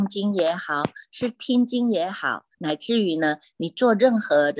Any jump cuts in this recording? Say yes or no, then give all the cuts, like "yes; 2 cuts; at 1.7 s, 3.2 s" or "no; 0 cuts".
yes; 1 cut; at 2.5 s